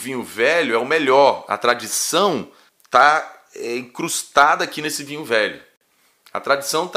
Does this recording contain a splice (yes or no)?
yes